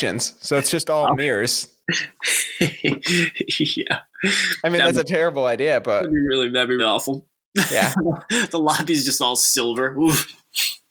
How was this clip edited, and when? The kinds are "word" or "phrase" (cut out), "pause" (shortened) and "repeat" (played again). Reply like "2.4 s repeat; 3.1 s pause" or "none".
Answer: 6.8 s word